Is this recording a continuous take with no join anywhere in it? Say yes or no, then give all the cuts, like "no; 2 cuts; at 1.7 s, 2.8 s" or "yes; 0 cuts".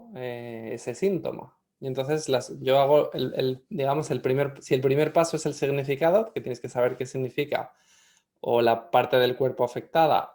yes; 0 cuts